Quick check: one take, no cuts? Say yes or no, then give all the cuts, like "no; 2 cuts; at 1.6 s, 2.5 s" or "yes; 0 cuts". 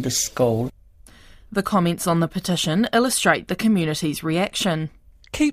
yes; 0 cuts